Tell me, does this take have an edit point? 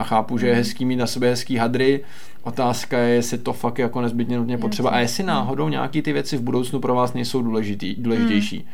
no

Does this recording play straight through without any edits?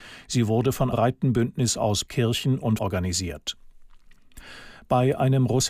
no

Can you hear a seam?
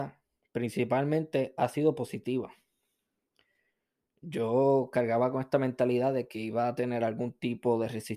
no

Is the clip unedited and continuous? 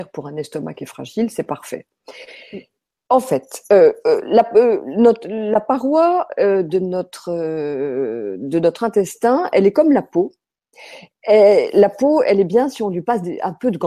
yes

